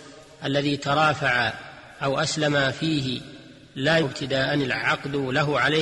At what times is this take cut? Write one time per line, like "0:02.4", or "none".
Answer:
0:04.0